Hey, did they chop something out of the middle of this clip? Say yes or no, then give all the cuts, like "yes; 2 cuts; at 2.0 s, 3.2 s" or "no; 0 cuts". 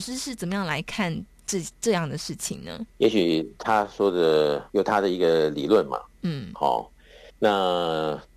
yes; 3 cuts; at 2.9 s, 4.7 s, 7.3 s